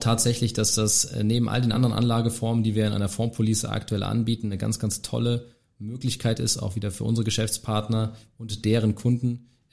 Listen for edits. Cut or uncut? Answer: uncut